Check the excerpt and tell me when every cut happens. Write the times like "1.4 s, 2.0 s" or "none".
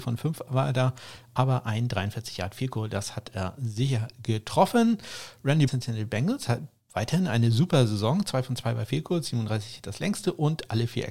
5.7 s